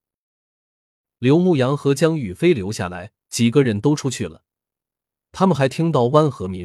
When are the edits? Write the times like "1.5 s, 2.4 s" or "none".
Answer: 3.2 s